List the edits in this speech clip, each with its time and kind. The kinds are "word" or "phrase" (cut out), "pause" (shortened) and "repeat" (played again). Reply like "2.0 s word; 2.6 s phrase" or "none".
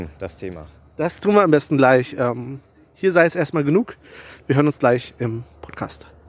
none